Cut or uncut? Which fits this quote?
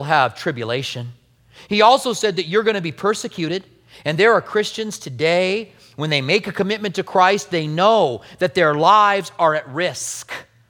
uncut